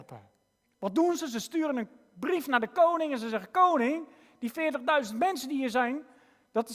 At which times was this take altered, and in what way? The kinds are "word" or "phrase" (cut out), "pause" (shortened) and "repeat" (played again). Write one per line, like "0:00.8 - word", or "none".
none